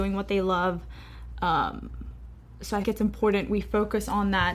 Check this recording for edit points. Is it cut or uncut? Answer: cut